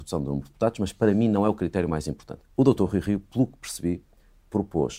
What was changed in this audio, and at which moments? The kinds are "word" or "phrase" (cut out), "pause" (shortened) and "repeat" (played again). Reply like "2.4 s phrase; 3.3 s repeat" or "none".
2.5 s pause